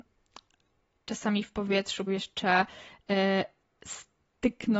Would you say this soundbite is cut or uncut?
cut